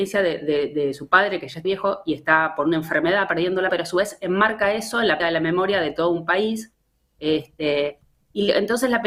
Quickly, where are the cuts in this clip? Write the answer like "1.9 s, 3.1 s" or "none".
1.6 s, 3.7 s, 5.2 s